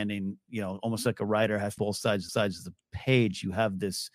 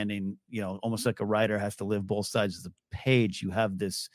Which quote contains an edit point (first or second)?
first